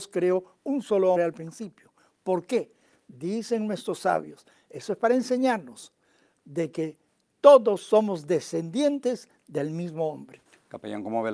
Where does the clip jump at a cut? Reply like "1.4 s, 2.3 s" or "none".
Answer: 1.2 s